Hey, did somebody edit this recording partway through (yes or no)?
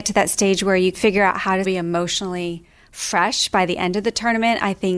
yes